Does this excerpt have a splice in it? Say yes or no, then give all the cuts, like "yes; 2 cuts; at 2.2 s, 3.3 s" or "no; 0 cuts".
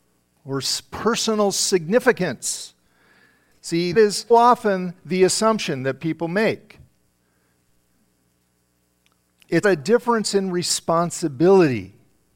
yes; 3 cuts; at 3.9 s, 4.3 s, 9.6 s